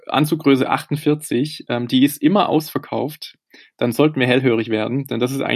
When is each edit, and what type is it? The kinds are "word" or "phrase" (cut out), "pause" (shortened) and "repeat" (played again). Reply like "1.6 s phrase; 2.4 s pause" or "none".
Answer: none